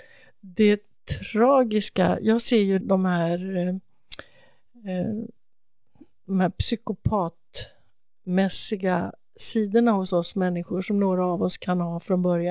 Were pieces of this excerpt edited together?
yes; 1 cut; at 2.8 s

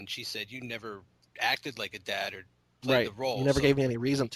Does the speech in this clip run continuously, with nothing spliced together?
yes; 0 cuts

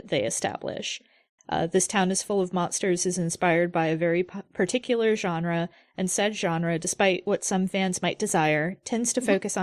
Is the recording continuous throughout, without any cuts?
yes; 0 cuts

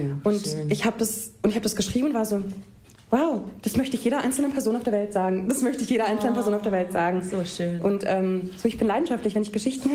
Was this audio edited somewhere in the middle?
no; 0 cuts

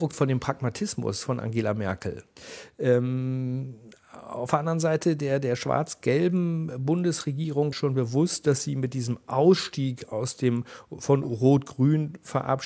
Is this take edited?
yes; 1 cut; at 7.7 s

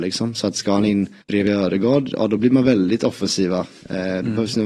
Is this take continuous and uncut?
no; 1 cut; at 1.2 s

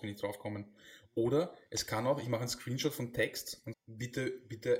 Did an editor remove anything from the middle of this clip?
yes; 1 cut; at 3.7 s

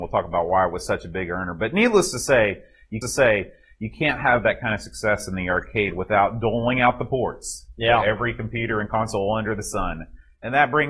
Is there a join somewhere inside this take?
yes; 1 cut; at 3.0 s

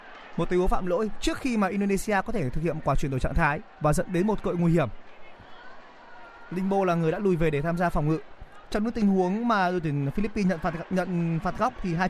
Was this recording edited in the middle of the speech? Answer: no; 0 cuts

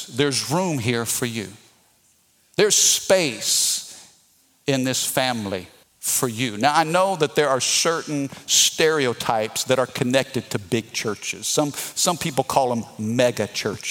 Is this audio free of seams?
no; 1 cut; at 5.8 s

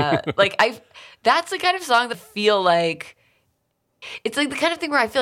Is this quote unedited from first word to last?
no; 1 cut; at 2.1 s

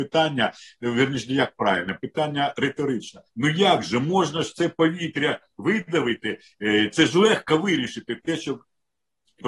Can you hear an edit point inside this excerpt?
yes; 1 cut; at 3.3 s

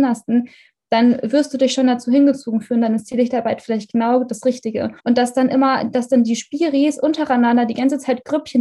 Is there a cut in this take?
yes; 1 cut; at 5.0 s

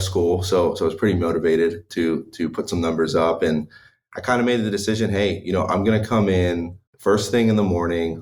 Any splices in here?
yes; 1 cut; at 6.9 s

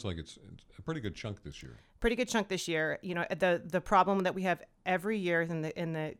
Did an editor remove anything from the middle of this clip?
no; 0 cuts

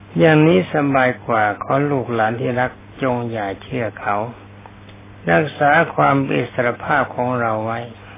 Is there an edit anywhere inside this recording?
no; 0 cuts

